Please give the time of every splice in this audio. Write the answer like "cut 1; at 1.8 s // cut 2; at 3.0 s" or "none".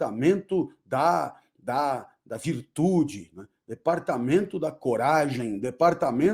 none